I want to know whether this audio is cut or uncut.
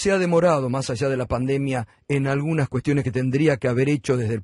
uncut